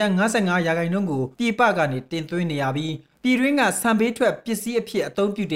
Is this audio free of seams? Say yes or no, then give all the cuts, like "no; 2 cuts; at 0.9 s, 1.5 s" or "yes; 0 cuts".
no; 1 cut; at 1.3 s